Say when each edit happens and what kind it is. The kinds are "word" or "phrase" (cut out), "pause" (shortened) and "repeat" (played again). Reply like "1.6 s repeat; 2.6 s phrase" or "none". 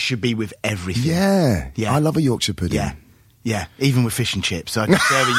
none